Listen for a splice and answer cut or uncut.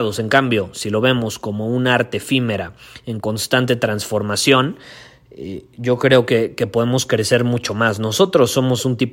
uncut